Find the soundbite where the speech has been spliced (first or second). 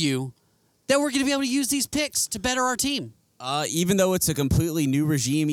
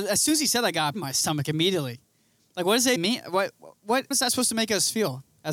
second